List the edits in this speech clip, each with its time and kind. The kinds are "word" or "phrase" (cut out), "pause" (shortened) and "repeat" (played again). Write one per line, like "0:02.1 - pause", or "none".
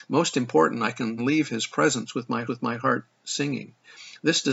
0:01.2 - word
0:02.5 - repeat